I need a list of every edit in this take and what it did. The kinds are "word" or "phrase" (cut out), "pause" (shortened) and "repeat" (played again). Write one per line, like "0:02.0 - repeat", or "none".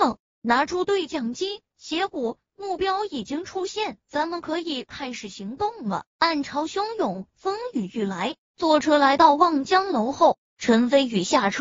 0:01.7 - pause
0:04.0 - pause
0:06.1 - pause
0:08.4 - pause